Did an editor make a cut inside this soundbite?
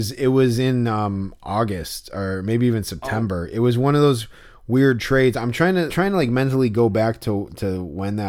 yes; 1 cut; at 5.9 s

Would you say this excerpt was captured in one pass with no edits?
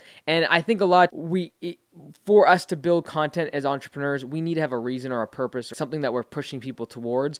no; 2 cuts; at 1.1 s, 5.7 s

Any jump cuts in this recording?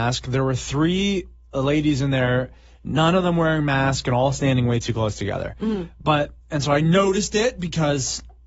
no; 0 cuts

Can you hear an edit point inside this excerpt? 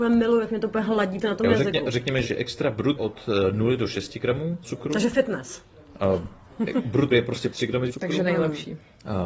yes; 7 cuts; at 1.2 s, 2.2 s, 2.9 s, 4.6 s, 7.1 s, 7.5 s, 7.9 s

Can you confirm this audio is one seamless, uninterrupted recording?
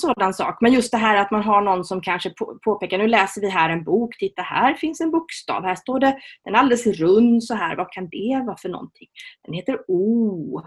yes; 0 cuts

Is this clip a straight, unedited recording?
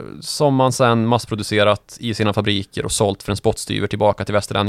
yes; 0 cuts

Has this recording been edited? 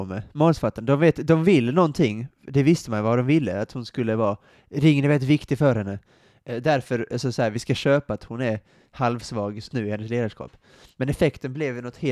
yes; 1 cut; at 9.7 s

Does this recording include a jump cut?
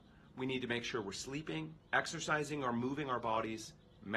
yes; 1 cut; at 1.8 s

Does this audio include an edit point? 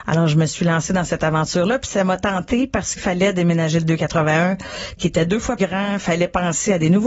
yes; 2 cuts; at 3.0 s, 5.6 s

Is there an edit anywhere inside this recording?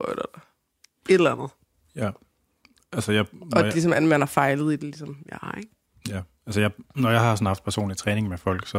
no; 0 cuts

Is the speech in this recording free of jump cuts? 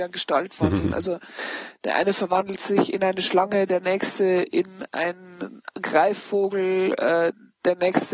yes; 0 cuts

